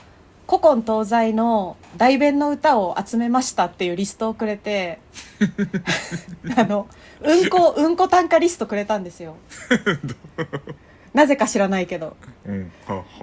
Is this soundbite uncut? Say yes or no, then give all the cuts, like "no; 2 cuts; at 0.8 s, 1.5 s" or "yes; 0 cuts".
yes; 0 cuts